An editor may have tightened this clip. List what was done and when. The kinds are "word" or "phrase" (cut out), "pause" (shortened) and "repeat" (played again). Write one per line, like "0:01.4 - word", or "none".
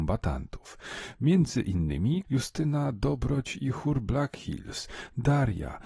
0:02.2 - word